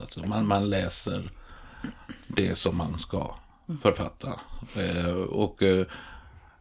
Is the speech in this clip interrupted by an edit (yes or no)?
no